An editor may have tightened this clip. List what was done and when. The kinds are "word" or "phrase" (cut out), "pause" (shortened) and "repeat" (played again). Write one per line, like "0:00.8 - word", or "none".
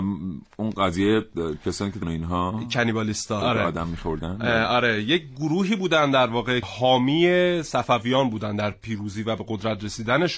0:02.0 - phrase
0:03.4 - word
0:06.6 - word